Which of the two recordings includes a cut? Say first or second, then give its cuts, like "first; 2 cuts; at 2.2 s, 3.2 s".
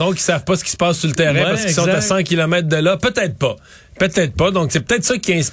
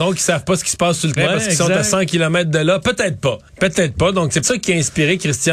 second; 3 cuts; at 1.2 s, 3.5 s, 4.4 s